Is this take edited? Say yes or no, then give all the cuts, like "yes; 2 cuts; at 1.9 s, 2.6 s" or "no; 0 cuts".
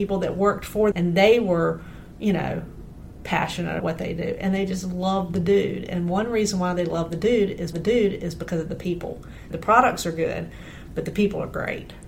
yes; 3 cuts; at 0.9 s, 3.8 s, 7.7 s